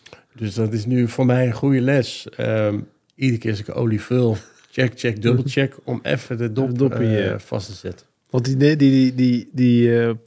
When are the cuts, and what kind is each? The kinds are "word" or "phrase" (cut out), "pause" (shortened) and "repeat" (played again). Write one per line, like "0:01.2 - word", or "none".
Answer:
none